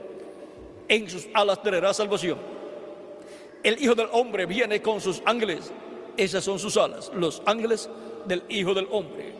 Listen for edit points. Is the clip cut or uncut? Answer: uncut